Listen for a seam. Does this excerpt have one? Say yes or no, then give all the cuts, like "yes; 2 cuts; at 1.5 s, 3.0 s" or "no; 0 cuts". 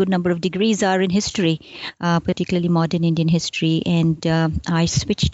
no; 0 cuts